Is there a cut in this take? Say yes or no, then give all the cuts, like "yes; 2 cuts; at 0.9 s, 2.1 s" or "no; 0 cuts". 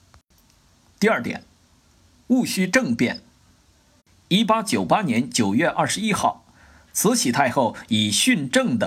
no; 0 cuts